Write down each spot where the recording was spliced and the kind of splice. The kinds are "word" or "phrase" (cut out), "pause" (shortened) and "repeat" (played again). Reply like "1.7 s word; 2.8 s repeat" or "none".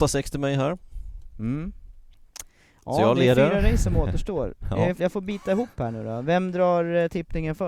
5.0 s word